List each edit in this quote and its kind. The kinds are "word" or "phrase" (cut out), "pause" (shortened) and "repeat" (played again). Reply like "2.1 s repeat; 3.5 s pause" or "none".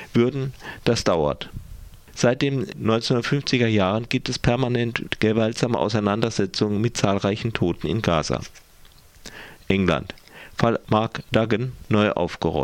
none